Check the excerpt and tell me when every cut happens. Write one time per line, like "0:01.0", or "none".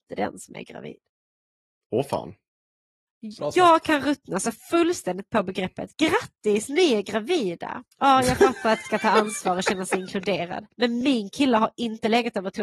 0:07.9
0:08.8
0:10.7